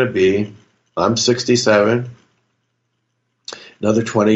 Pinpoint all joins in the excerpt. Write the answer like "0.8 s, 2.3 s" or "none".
none